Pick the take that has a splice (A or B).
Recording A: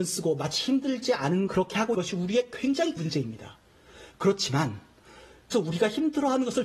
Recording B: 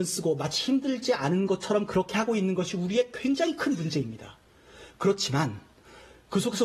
A